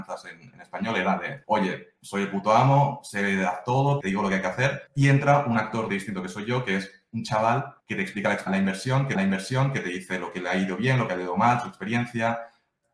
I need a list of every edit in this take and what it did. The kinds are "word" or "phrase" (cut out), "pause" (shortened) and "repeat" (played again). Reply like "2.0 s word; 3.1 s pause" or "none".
1.4 s pause; 4.0 s word; 4.9 s pause; 5.9 s word; 7.8 s pause; 8.5 s word; 9.1 s repeat